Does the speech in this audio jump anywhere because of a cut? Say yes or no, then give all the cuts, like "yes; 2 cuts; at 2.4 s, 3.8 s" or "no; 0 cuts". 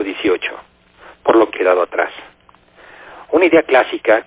yes; 1 cut; at 1.5 s